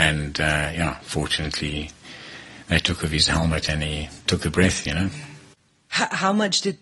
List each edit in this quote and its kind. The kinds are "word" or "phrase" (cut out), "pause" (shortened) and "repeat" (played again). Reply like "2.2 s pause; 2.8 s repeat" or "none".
4.2 s pause